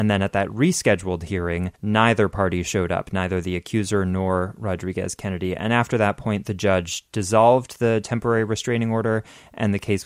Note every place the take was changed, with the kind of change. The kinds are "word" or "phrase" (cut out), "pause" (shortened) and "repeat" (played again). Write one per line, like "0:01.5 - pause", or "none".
0:01.7 - pause